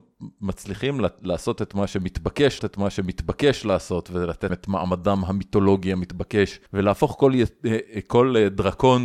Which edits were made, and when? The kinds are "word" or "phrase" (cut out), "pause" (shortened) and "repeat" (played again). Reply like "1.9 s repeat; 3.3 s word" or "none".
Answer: 2.6 s repeat; 4.5 s word; 6.7 s pause